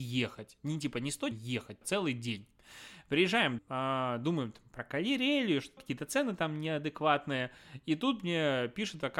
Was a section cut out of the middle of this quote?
yes; 4 cuts; at 1.3 s, 1.8 s, 3.6 s, 5.8 s

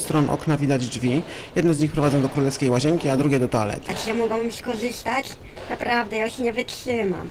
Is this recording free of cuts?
yes; 0 cuts

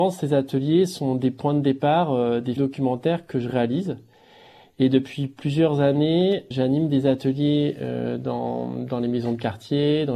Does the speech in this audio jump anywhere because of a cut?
yes; 2 cuts; at 2.6 s, 6.5 s

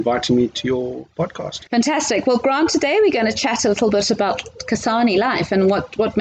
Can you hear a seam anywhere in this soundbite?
yes; 1 cut; at 1.7 s

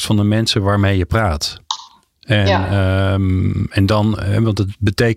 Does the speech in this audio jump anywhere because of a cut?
no; 0 cuts

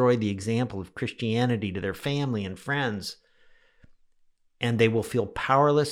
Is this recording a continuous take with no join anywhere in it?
yes; 0 cuts

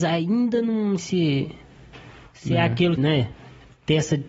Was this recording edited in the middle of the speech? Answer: yes; 2 cuts; at 1.0 s, 3.0 s

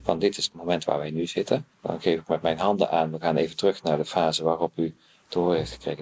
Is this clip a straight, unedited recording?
no; 1 cut; at 1.7 s

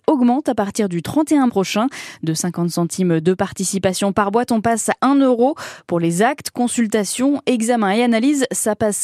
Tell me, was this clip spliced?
yes; 2 cuts; at 1.5 s, 5.0 s

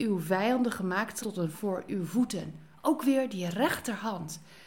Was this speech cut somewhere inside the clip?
yes; 2 cuts; at 1.2 s, 1.5 s

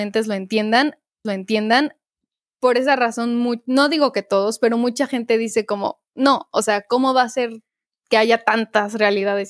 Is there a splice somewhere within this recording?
yes; 1 cut; at 1.2 s

